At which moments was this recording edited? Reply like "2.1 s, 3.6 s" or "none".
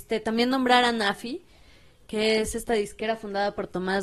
none